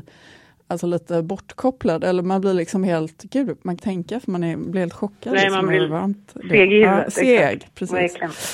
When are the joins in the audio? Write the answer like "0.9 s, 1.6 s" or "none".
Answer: 3.8 s